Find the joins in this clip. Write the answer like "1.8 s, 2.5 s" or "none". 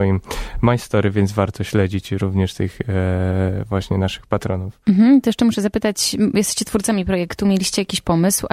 none

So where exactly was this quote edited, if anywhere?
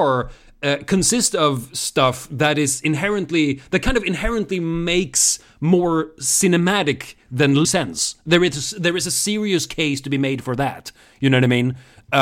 7.6 s

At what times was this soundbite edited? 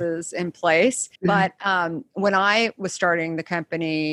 1.1 s

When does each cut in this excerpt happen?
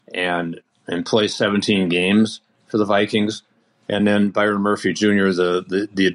none

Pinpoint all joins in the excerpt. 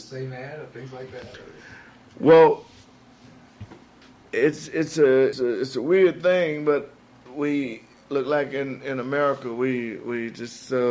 5.3 s, 7.3 s

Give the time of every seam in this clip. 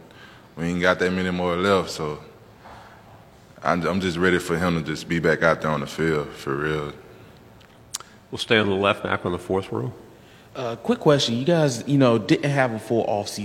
none

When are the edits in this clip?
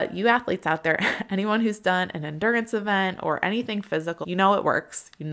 4.2 s

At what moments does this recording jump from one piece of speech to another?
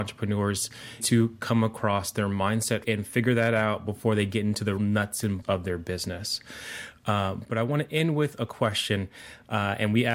1.0 s, 2.8 s, 4.8 s, 5.4 s

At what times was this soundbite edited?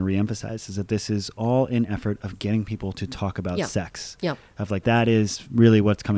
4.8 s

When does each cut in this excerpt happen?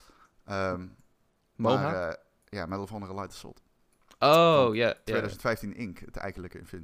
none

